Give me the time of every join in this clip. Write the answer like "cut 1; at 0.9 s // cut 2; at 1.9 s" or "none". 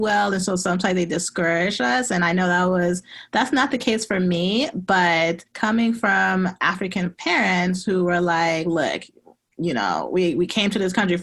cut 1; at 5.5 s